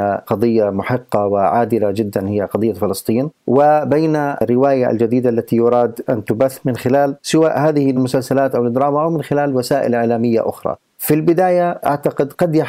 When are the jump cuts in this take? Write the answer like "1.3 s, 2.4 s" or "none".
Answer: 3.3 s